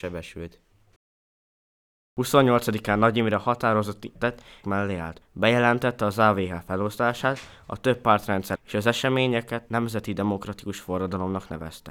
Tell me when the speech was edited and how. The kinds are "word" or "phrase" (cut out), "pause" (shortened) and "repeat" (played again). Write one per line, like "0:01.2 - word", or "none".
0:04.2 - word
0:04.6 - phrase
0:05.2 - pause
0:08.6 - word